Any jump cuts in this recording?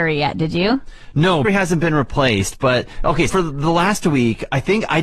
yes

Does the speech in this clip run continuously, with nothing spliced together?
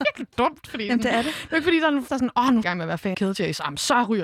no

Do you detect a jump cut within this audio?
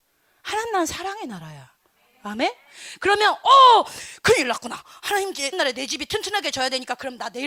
yes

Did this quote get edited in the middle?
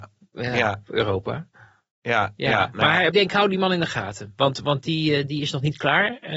yes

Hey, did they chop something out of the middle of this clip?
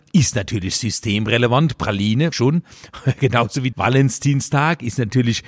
yes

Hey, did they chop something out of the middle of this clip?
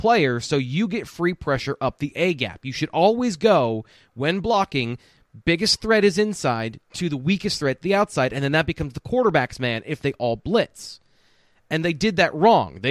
no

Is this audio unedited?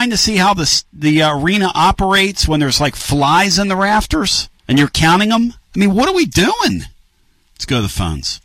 no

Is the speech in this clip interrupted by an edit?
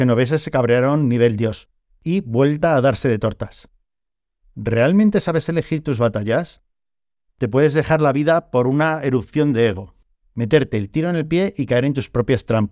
no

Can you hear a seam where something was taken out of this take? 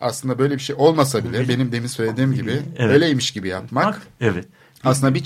no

